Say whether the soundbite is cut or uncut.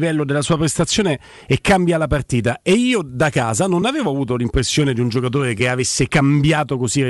uncut